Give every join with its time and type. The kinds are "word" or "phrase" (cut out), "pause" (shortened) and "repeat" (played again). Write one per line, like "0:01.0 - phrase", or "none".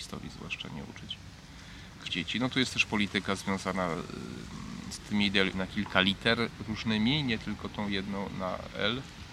0:02.1 - word
0:05.5 - word